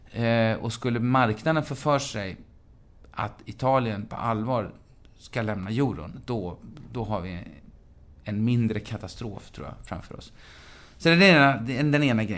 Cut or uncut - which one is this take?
uncut